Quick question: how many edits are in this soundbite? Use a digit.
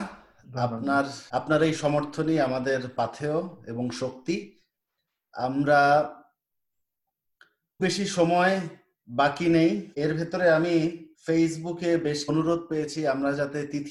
5